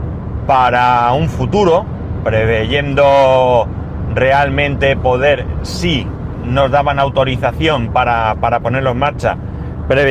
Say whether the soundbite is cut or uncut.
uncut